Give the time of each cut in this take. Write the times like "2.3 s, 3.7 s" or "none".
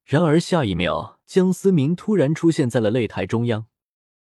1.2 s